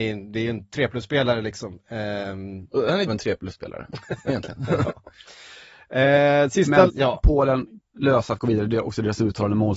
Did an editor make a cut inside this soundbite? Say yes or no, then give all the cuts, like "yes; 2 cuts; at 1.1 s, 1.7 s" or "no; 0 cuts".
yes; 3 cuts; at 3.1 s, 6.9 s, 7.9 s